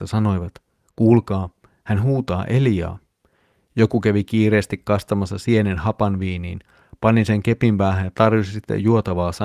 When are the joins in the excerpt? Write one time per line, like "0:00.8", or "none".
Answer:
none